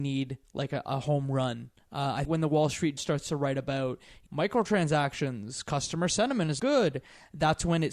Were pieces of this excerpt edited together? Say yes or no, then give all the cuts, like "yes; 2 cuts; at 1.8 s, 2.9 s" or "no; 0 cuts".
yes; 4 cuts; at 2.2 s, 3.0 s, 4.3 s, 6.6 s